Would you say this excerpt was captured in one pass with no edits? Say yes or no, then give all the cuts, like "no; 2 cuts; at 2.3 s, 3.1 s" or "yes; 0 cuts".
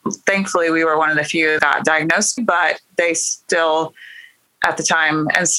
no; 2 cuts; at 1.6 s, 2.4 s